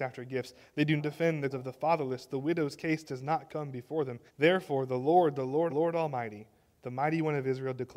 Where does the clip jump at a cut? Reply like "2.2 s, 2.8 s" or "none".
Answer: 1.0 s, 1.5 s, 4.3 s, 5.7 s